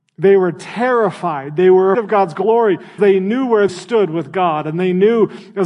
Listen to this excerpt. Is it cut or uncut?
cut